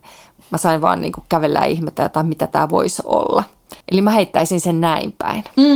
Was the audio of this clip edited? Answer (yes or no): yes